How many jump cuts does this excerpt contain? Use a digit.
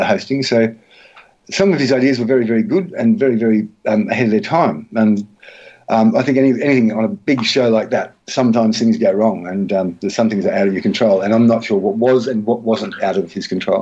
0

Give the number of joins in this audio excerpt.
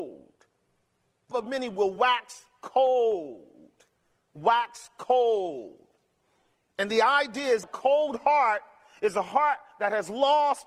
2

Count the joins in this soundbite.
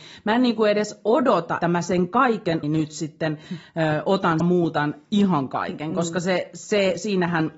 3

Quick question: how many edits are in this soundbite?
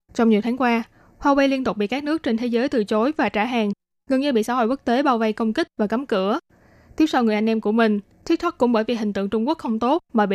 0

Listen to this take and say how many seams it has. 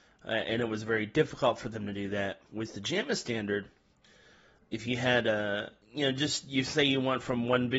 2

